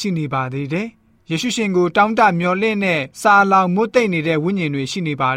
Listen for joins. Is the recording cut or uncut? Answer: cut